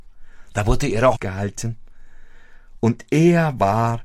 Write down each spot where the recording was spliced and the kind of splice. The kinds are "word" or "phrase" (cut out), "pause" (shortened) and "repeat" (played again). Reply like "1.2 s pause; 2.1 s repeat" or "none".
1.2 s word